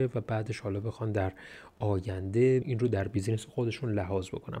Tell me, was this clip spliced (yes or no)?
yes